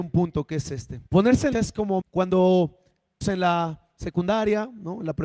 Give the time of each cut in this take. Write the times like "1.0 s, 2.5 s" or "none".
1.1 s, 1.5 s, 2.0 s, 3.2 s

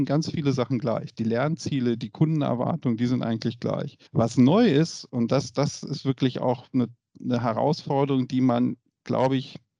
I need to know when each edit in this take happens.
4.1 s

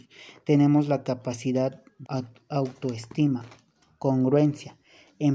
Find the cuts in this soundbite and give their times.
2.0 s

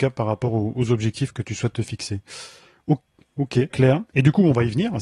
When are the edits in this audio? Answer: 1.3 s, 3.7 s

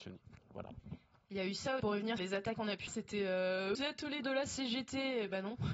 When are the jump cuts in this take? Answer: 1.8 s, 2.2 s, 2.5 s, 2.9 s, 3.7 s, 4.2 s

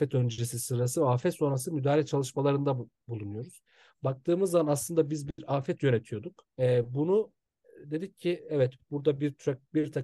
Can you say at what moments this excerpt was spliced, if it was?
6.5 s

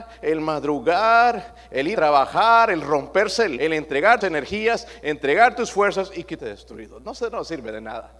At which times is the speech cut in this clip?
1.9 s, 3.6 s, 4.2 s, 6.4 s

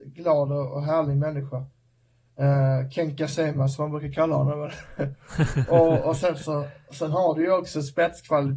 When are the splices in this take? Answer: none

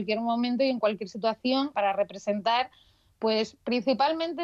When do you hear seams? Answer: 1.7 s

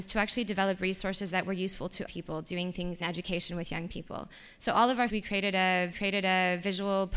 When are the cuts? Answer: 2.1 s, 3.0 s, 5.1 s, 5.9 s

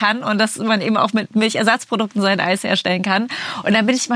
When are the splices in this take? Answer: none

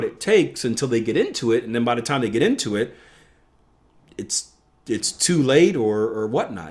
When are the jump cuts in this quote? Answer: none

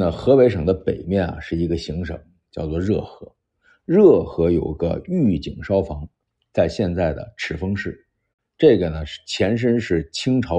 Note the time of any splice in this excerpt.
none

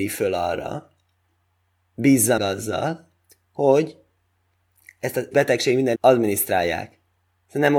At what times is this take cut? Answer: 2.4 s, 3.3 s, 5.3 s, 6.0 s

